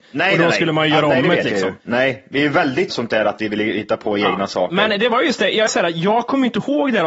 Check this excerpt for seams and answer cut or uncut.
cut